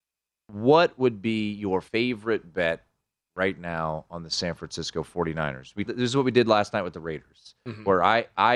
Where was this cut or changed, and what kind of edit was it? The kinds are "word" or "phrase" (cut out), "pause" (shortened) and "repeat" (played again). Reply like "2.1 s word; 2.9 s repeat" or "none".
1.9 s pause; 5.9 s phrase